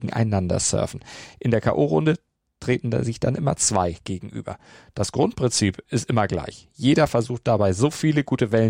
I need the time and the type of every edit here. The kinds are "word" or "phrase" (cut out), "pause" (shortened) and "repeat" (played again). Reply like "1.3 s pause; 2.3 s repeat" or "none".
none